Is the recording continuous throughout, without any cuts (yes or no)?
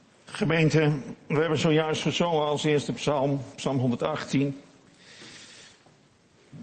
yes